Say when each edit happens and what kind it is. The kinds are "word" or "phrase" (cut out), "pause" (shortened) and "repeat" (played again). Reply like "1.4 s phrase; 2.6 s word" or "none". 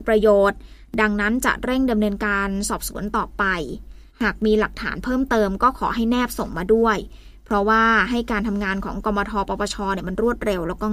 4.1 s pause